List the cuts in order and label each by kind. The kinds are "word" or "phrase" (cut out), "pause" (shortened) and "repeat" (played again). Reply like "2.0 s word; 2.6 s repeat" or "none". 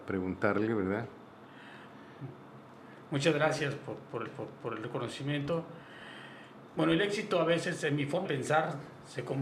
4.3 s repeat; 8.2 s word